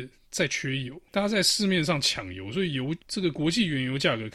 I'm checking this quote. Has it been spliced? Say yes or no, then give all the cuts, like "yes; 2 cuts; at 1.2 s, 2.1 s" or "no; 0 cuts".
yes; 2 cuts; at 1.1 s, 3.0 s